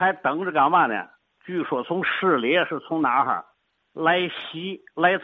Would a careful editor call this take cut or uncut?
uncut